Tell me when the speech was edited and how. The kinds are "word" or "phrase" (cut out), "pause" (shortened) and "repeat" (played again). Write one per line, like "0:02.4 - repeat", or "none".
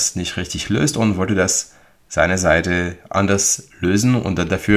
none